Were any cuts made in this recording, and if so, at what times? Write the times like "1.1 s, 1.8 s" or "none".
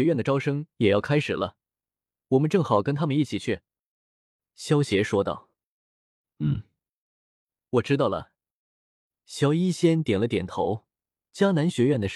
7.5 s